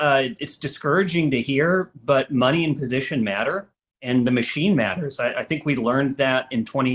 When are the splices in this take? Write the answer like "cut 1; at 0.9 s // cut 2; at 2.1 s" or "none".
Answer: none